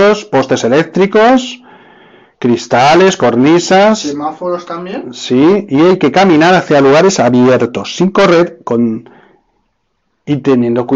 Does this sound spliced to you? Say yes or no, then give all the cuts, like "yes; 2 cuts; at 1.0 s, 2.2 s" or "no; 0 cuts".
no; 0 cuts